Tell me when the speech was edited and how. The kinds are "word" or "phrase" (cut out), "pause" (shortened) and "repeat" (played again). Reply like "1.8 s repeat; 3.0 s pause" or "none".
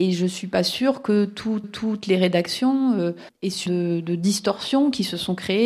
1.6 s repeat; 3.7 s phrase

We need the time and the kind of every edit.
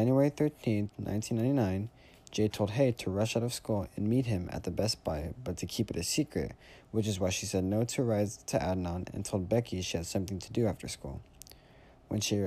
none

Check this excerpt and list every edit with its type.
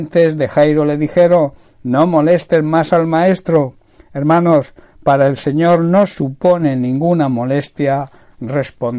none

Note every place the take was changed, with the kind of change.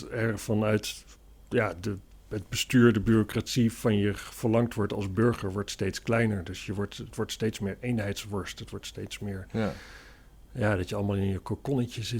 none

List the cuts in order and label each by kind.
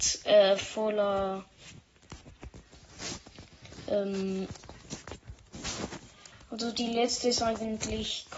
none

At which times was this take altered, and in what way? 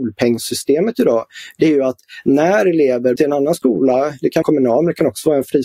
3.2 s word; 4.4 s phrase

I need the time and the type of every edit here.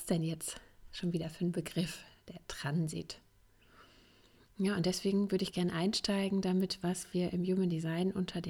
none

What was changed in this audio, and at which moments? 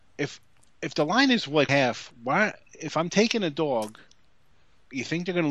1.7 s phrase

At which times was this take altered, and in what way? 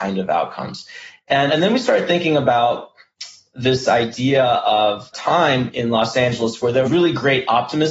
1.5 s word; 5.1 s word; 6.8 s word

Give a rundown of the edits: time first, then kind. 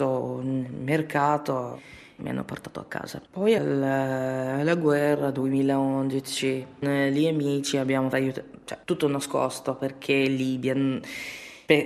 2.2 s word; 3.3 s pause; 3.6 s word; 6.8 s word; 8.1 s phrase; 8.8 s pause

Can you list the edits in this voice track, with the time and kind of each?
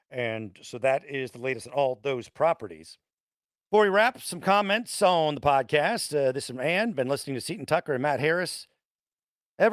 none

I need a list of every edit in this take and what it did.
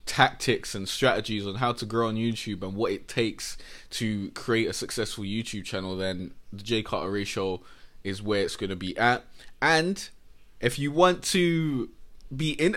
none

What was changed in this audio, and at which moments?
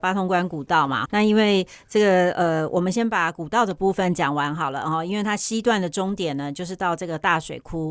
1.1 s word

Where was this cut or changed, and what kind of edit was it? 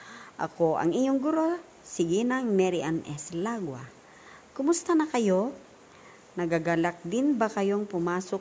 none

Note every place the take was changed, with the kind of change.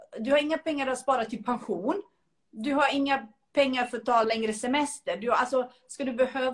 4.2 s word

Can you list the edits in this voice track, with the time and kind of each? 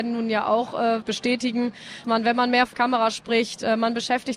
1.0 s word; 2.0 s word; 2.7 s word

